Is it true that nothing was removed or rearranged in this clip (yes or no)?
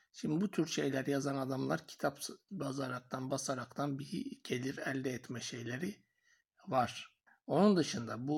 no